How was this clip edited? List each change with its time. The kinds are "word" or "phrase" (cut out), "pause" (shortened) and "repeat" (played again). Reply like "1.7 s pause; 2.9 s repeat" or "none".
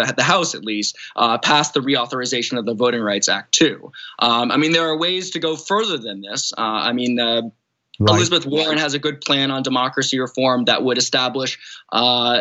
none